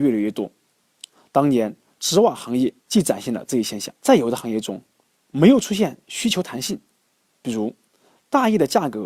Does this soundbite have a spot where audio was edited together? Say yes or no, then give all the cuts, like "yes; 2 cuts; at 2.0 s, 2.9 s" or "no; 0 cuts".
yes; 2 cuts; at 2.8 s, 4.0 s